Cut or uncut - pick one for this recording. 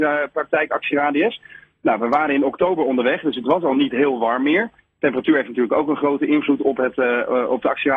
uncut